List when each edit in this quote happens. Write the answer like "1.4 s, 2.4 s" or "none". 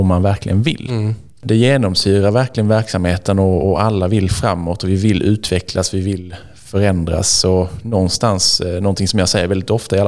none

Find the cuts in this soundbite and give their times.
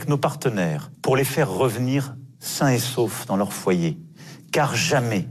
2.3 s

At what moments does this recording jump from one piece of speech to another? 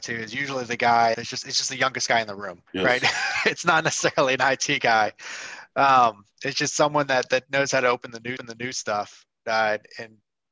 1.1 s, 2.7 s, 6.3 s, 8.4 s

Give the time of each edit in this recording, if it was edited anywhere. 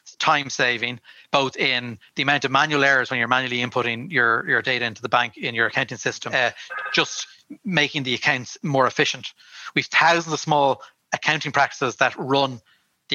none

